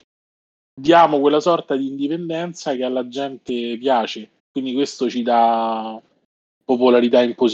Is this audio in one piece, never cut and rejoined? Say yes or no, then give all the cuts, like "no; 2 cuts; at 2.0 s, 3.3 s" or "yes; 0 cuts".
no; 1 cut; at 4.4 s